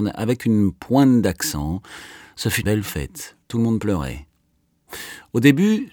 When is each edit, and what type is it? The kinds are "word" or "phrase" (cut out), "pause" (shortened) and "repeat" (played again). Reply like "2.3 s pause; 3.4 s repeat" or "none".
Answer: 2.6 s word; 3.4 s pause